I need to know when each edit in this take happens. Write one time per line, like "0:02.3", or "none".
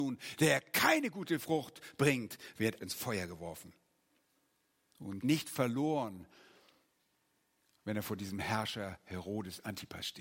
0:02.8
0:05.2